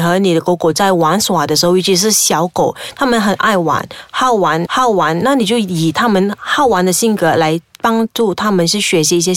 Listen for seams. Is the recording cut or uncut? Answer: cut